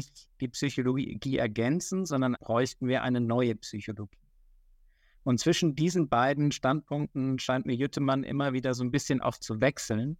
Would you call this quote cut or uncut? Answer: cut